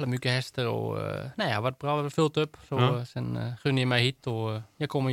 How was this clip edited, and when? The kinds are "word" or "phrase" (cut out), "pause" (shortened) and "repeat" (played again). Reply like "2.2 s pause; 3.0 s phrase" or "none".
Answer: none